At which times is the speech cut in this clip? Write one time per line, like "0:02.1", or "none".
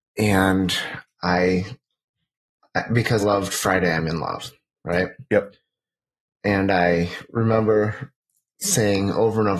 0:03.2

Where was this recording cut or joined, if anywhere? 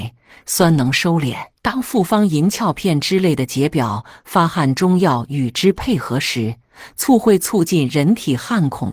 0:01.6

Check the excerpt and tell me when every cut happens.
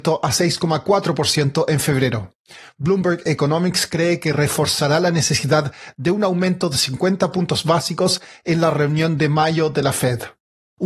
none

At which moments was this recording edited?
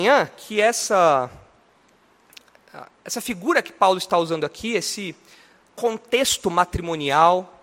none

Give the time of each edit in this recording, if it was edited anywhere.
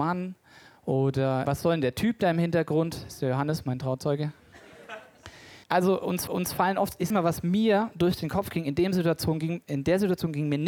0:01.5
0:05.6
0:06.3
0:07.1

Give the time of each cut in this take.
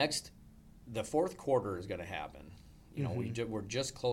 none

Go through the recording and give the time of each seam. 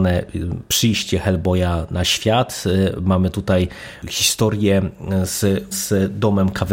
0:05.7

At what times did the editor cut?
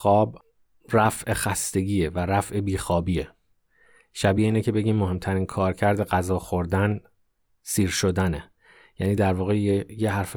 none

